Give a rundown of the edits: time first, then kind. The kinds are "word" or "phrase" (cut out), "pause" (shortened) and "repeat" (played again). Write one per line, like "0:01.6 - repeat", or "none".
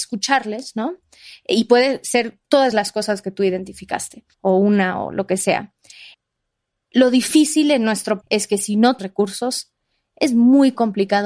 0:02.4 - pause
0:04.3 - pause
0:08.2 - word
0:09.0 - word

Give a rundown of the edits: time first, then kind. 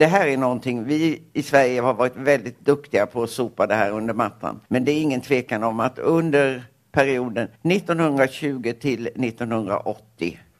0:04.7 - pause
0:07.6 - pause

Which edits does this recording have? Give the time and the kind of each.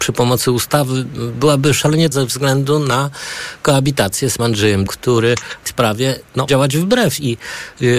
0:02.1 - word
0:04.4 - word
0:04.9 - word
0:05.7 - word
0:06.5 - word

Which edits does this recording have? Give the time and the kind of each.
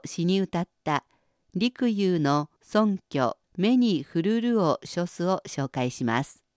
0:02.6 - pause
0:03.4 - pause

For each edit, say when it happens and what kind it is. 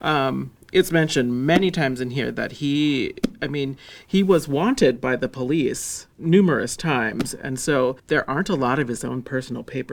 0:06.1 - pause
0:08.0 - pause

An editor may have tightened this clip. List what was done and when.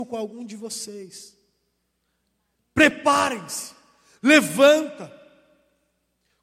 none

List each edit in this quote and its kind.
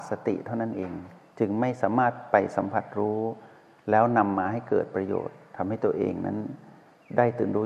none

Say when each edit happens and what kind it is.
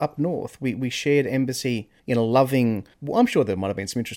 0:02.0 - pause
0:02.9 - pause

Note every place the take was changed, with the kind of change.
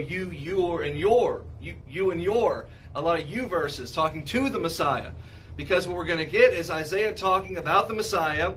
none

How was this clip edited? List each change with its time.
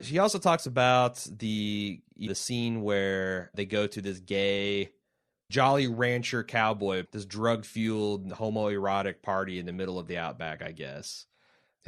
0:02.3 - word
0:03.5 - word
0:05.5 - word
0:07.1 - word

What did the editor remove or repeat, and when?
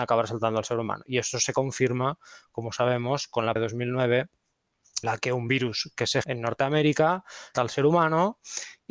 0:03.6 - word
0:05.0 - word
0:06.2 - word
0:07.5 - word

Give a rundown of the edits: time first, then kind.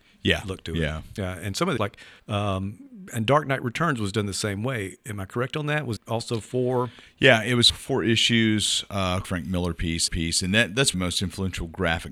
0:01.8 - word
0:02.2 - pause
0:06.0 - word
0:07.7 - word
0:09.2 - phrase
0:10.1 - repeat
0:10.9 - word

